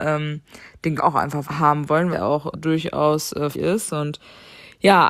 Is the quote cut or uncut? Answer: cut